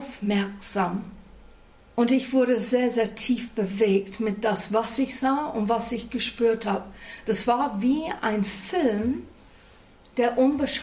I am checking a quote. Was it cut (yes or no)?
no